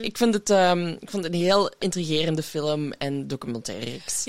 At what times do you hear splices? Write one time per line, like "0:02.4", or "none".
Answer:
0:01.8